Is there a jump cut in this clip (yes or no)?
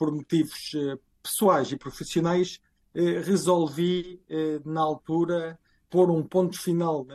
no